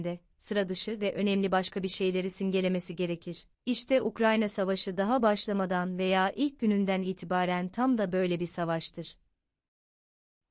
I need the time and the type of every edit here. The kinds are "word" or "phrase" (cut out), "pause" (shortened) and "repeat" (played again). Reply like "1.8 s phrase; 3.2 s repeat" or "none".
3.5 s pause